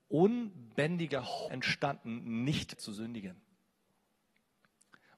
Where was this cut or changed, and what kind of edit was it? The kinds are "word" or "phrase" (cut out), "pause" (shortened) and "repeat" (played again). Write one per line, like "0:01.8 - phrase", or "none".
0:01.5 - word
0:02.8 - word